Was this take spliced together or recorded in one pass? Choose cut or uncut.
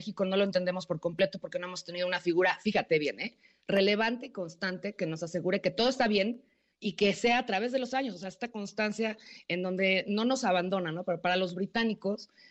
uncut